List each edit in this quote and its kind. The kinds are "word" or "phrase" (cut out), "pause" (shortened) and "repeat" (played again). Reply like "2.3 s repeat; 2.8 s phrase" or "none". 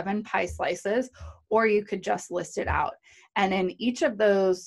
none

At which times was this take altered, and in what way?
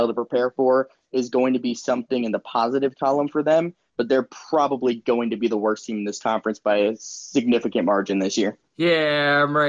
none

